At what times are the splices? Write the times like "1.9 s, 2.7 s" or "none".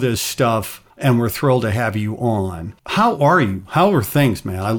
0.9 s, 2.8 s